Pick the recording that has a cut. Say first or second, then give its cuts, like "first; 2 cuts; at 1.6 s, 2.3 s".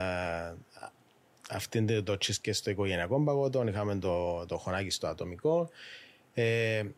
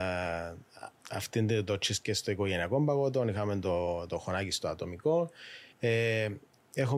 second; 2 cuts; at 1.0 s, 5.7 s